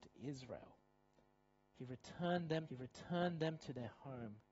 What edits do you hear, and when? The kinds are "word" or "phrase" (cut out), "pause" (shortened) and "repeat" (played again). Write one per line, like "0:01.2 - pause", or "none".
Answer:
0:02.7 - repeat